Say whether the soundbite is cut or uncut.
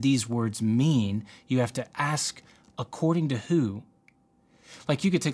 uncut